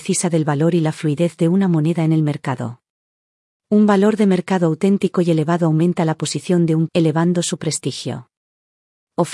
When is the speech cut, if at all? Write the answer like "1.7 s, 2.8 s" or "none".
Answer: 6.9 s